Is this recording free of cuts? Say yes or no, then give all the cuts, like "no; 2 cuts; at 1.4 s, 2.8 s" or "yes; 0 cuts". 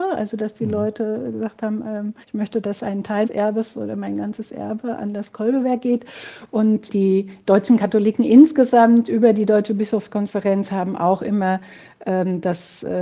no; 3 cuts; at 2.2 s, 3.2 s, 6.9 s